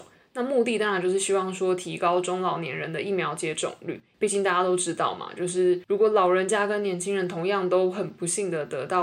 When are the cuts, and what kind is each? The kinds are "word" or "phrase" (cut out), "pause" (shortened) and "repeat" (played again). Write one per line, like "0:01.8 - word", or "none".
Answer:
0:04.1 - pause